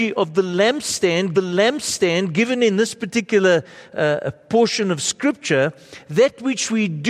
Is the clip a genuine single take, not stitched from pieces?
no; 1 cut; at 1.3 s

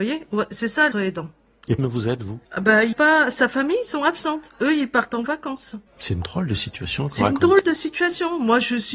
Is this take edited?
yes; 5 cuts; at 0.9 s, 1.8 s, 2.4 s, 2.9 s, 5.9 s

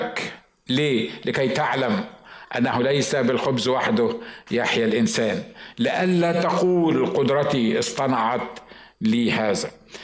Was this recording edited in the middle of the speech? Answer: no; 0 cuts

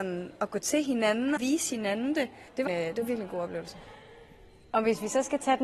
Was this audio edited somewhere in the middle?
yes; 2 cuts; at 1.4 s, 2.7 s

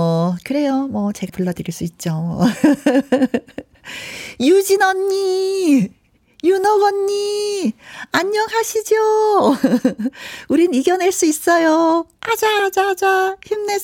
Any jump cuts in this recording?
yes; 2 cuts; at 1.3 s, 12.6 s

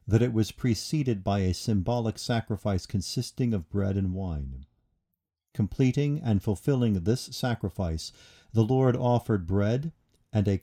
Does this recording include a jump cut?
no; 0 cuts

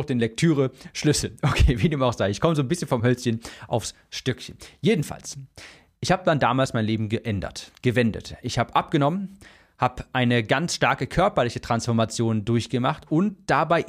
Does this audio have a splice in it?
no; 0 cuts

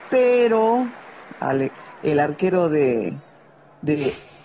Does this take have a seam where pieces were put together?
yes; 1 cut; at 3.4 s

